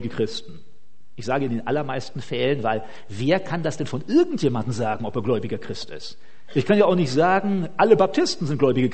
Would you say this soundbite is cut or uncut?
uncut